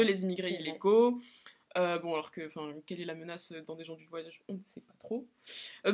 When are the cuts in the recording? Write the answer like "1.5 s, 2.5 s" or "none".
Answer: none